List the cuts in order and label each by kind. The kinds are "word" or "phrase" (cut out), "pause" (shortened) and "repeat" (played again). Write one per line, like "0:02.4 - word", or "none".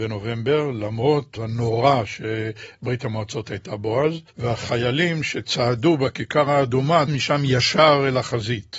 0:01.4 - word
0:04.3 - pause
0:07.1 - word